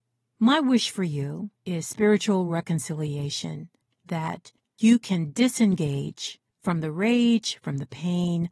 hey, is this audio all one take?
yes; 0 cuts

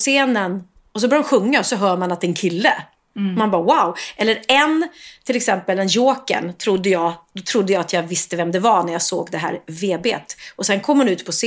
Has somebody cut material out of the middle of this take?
no; 0 cuts

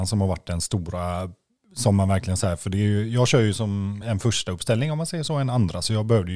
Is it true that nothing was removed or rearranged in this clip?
yes; 0 cuts

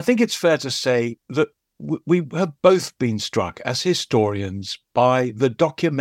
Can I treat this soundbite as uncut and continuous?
yes; 0 cuts

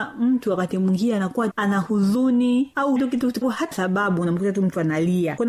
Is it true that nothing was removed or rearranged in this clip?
no; 4 cuts; at 1.5 s, 3.0 s, 3.4 s, 3.7 s

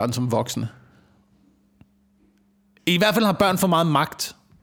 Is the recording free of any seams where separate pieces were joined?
yes; 0 cuts

